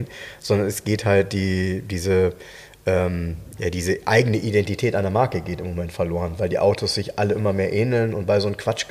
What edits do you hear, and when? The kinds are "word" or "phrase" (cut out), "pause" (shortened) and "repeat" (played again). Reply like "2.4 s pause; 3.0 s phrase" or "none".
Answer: none